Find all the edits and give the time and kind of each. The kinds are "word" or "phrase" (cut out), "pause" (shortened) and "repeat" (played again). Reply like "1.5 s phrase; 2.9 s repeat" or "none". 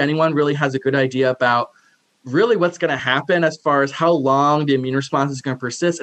none